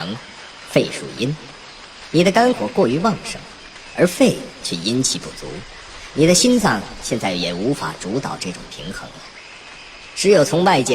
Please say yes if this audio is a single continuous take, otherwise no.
yes